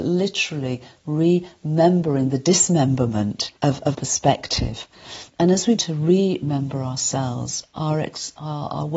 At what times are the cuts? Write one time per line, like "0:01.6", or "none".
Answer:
0:03.6
0:03.9
0:05.8